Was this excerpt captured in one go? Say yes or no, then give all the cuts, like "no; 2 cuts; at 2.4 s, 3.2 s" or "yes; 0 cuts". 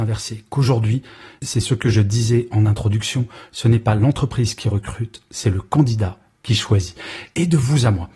yes; 0 cuts